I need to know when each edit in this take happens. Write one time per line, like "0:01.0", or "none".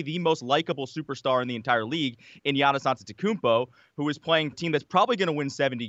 0:04.5